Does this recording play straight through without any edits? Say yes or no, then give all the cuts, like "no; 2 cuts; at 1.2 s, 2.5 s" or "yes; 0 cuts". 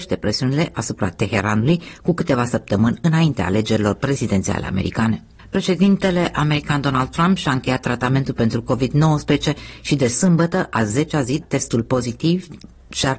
no; 1 cut; at 11.4 s